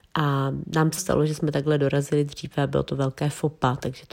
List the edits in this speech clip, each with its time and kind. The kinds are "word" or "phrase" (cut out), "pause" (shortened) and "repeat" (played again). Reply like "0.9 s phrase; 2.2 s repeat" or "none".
1.0 s word